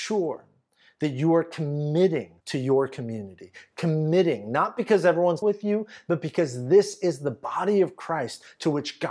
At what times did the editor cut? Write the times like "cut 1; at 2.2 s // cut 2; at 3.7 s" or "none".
cut 1; at 2.4 s // cut 2; at 5.4 s